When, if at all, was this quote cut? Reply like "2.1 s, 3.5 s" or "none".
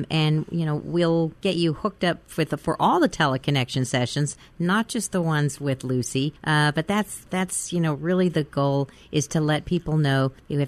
1.4 s, 6.4 s